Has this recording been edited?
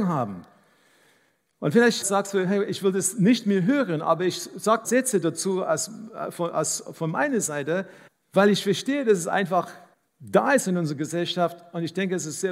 yes; 4 cuts; at 2.0 s, 4.8 s, 8.1 s, 9.9 s

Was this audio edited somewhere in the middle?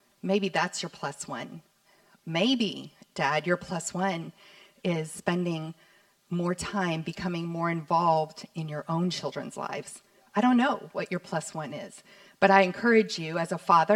no; 0 cuts

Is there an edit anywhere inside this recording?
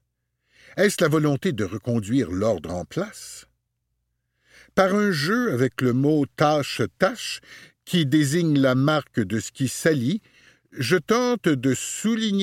no; 0 cuts

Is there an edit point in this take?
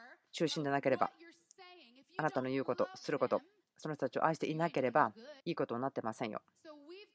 yes; 1 cut; at 5.4 s

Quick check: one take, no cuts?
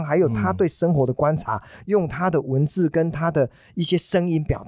yes; 0 cuts

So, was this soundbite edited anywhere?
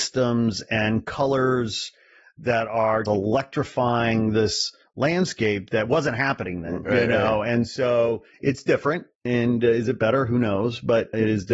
yes; 2 cuts; at 3.1 s, 6.9 s

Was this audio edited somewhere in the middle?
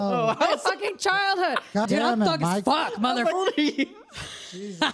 yes; 2 cuts; at 1.8 s, 3.3 s

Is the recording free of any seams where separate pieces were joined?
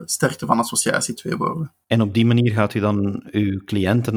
no; 2 cuts; at 1.2 s, 1.8 s

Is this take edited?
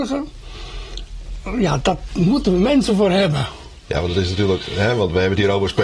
no; 0 cuts

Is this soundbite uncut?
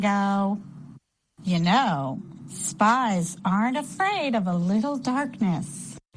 yes; 0 cuts

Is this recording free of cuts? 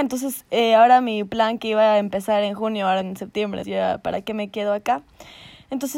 no; 2 cuts; at 3.0 s, 3.6 s

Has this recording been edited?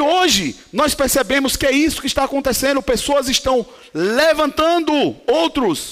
no; 0 cuts

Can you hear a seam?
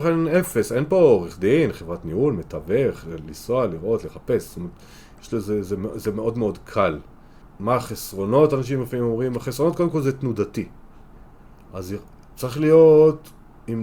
no; 0 cuts

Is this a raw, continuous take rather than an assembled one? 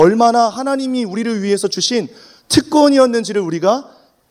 yes; 0 cuts

